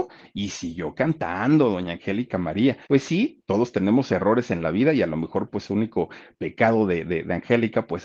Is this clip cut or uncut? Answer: cut